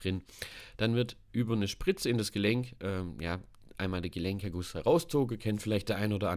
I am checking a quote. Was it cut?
no; 0 cuts

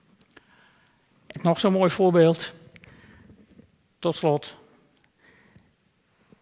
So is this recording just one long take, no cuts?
no; 1 cut; at 1.4 s

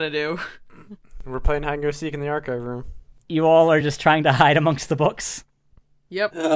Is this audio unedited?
yes; 0 cuts

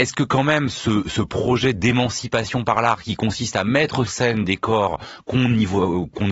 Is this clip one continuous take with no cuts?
no; 1 cut; at 4.1 s

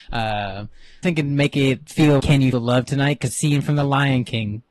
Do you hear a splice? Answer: yes; 4 cuts; at 1.0 s, 2.2 s, 2.5 s, 3.3 s

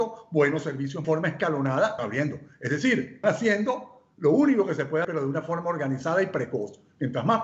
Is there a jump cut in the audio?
yes; 4 cuts; at 1.0 s, 2.0 s, 3.2 s, 5.0 s

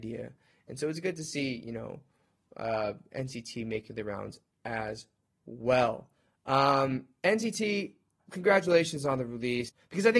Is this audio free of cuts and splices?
yes; 0 cuts

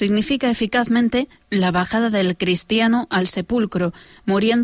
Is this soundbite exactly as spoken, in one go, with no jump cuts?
yes; 0 cuts

